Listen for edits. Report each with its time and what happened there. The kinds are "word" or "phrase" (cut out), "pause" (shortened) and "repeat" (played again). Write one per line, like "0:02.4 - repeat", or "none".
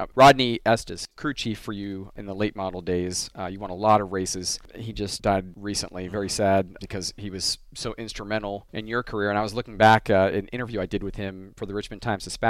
none